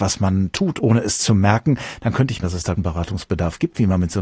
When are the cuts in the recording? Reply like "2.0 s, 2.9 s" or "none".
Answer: 2.4 s, 2.8 s